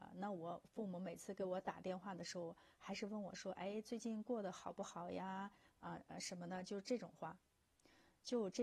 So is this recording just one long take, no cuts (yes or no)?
yes